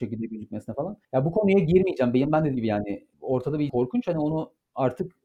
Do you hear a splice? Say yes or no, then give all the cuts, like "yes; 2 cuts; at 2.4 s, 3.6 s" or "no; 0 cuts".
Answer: yes; 4 cuts; at 1.0 s, 2.5 s, 3.1 s, 3.7 s